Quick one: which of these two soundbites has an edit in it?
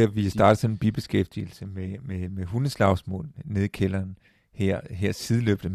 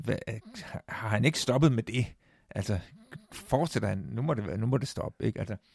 second; 1 cut; at 3.2 s

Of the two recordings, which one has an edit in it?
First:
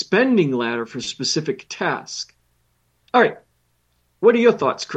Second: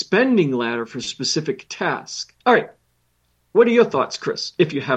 second; 1 cut; at 2.4 s

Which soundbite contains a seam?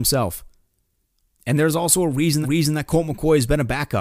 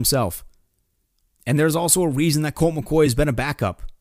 first; 1 cut; at 2.4 s

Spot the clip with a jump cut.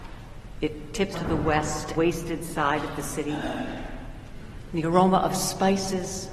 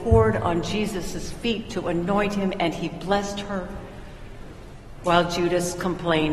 first; 2 cuts; at 1.1 s, 2.0 s

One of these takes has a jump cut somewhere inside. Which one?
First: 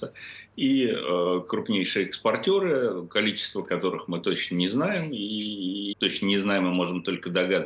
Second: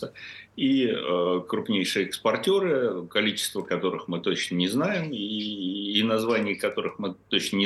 first; 1 cut; at 5.9 s

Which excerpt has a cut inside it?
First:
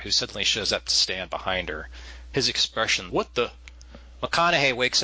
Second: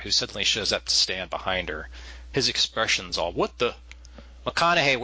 first; 1 cut; at 3.1 s

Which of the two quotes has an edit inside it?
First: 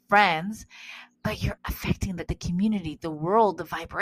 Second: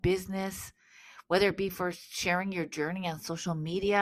first; 3 cuts; at 1.1 s, 1.6 s, 2.3 s

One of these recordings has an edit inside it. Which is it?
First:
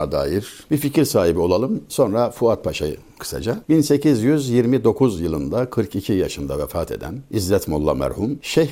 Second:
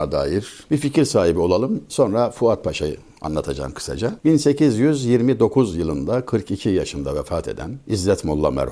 first; 1 cut; at 3.2 s

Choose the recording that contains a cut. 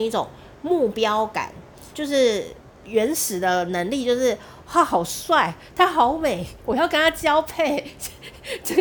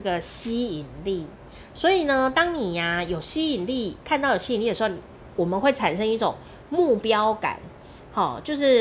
first; 2 cuts; at 1.9 s, 2.7 s

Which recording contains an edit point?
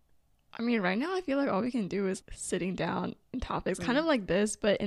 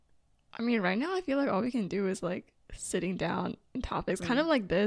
first; 1 cut; at 2.2 s

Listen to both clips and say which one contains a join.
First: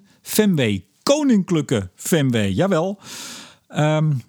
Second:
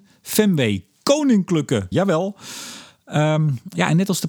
second; 1 cut; at 1.9 s

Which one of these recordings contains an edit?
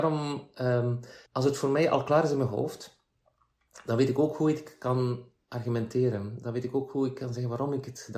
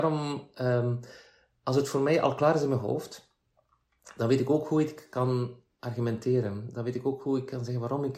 first; 1 cut; at 1.3 s

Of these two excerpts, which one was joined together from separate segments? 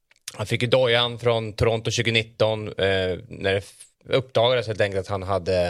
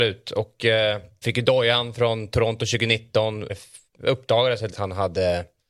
second; 3 cuts; at 1.2 s, 3.5 s, 4.7 s

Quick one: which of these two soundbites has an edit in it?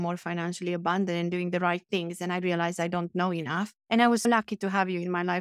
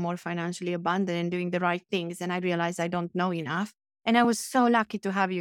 first; 2 cuts; at 3.8 s, 4.2 s

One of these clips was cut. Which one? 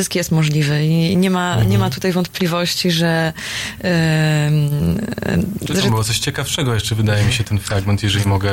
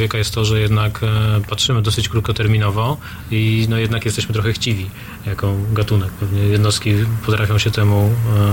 first; 1 cut; at 7.4 s

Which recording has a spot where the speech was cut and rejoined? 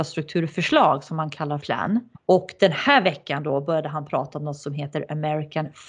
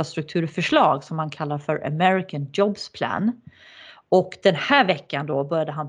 first; 2 cuts; at 1.6 s, 2.2 s

